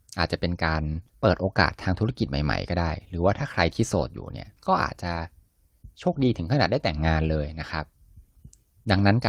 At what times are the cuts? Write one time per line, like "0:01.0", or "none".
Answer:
0:01.1
0:04.6